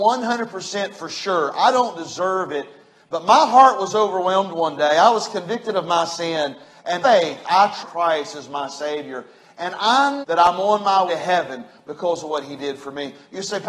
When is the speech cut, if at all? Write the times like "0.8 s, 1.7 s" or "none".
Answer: 7.0 s, 7.8 s, 10.2 s, 11.1 s